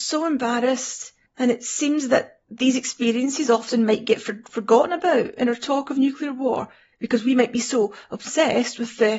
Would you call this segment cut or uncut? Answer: uncut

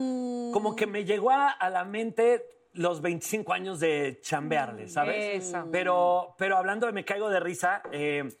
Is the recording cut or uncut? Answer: uncut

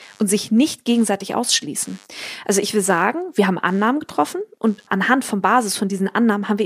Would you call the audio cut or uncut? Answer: uncut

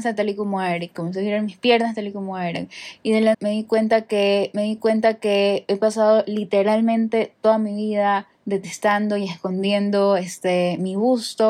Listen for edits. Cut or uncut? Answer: cut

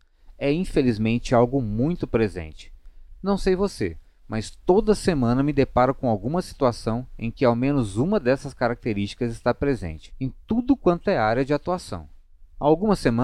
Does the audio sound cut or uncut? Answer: uncut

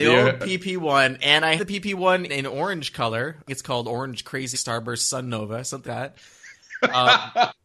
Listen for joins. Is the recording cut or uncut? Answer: cut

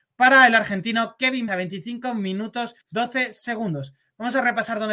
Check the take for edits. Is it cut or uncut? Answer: cut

